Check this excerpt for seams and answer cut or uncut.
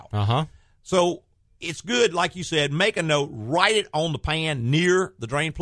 uncut